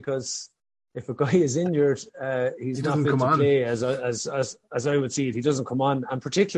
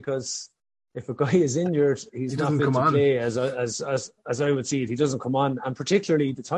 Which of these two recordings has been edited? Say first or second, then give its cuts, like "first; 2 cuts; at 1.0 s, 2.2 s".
second; 1 cut; at 2.1 s